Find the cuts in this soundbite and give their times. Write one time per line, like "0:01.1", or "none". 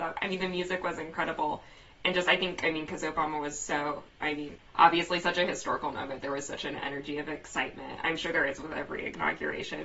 none